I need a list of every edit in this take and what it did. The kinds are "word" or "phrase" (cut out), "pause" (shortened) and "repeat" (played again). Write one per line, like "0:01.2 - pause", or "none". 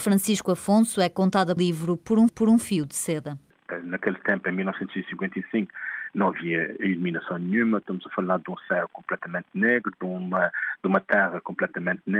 0:01.6 - phrase
0:02.3 - repeat